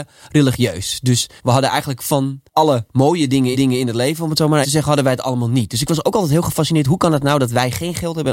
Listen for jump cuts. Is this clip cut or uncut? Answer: cut